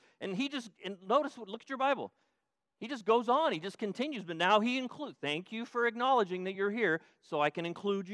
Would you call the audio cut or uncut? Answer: uncut